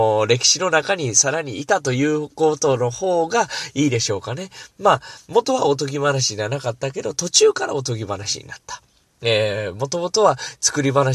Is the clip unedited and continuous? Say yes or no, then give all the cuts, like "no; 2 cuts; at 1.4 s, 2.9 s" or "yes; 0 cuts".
yes; 0 cuts